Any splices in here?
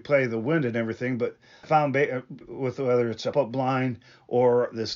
yes; 3 cuts; at 1.6 s, 2.4 s, 3.3 s

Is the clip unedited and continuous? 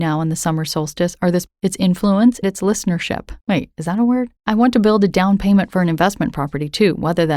no; 4 cuts; at 1.5 s, 2.4 s, 3.4 s, 4.4 s

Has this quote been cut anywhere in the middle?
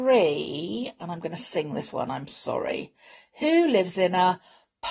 no; 0 cuts

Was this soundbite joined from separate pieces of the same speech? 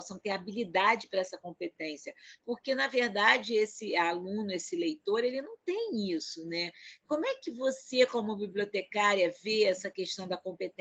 no; 0 cuts

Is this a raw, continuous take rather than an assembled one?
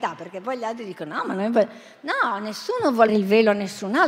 no; 1 cut; at 3.1 s

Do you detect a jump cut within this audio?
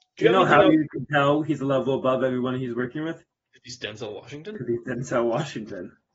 no; 0 cuts

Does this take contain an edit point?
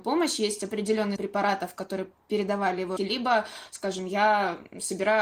yes; 2 cuts; at 1.2 s, 3.0 s

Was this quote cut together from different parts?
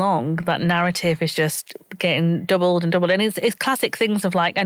no; 0 cuts

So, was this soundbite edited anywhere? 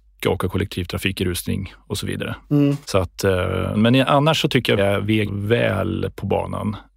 yes; 4 cuts; at 2.8 s, 3.7 s, 4.8 s, 5.3 s

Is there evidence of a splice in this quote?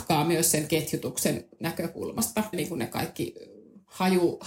yes; 1 cut; at 2.5 s

